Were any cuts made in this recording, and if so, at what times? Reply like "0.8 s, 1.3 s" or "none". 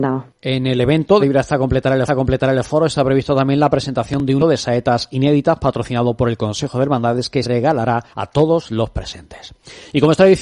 1.2 s, 2.1 s, 4.4 s, 7.4 s, 8.1 s